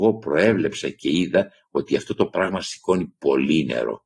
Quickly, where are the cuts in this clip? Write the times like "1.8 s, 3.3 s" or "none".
none